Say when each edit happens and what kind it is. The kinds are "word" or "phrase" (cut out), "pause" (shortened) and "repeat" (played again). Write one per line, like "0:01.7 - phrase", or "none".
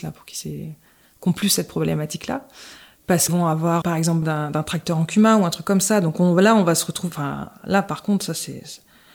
0:03.3 - word
0:03.8 - word
0:04.2 - word